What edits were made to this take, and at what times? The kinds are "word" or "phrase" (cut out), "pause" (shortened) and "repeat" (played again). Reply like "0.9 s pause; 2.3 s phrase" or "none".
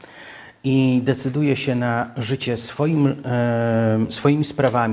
none